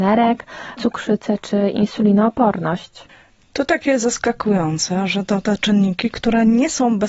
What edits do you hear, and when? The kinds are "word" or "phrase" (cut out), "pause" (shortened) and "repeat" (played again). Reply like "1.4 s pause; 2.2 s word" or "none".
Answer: none